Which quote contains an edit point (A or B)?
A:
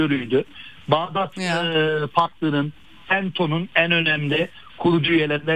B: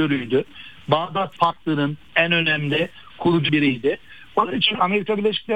B